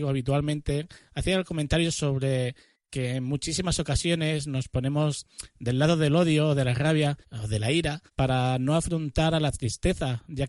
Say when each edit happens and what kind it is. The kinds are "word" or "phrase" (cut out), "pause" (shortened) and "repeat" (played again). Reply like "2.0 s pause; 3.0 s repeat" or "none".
7.2 s pause; 8.1 s pause